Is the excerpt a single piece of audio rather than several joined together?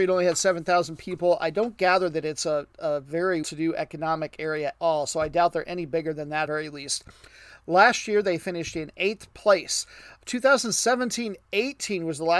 no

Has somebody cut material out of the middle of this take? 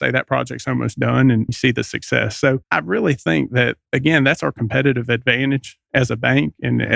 yes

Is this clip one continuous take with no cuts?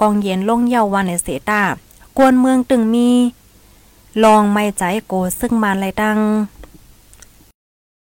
yes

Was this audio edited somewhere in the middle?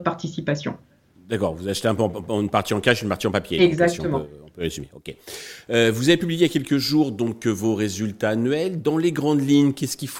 no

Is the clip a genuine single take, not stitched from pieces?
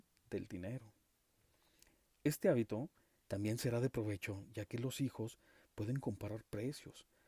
yes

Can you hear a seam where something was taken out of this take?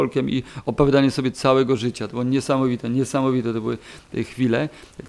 no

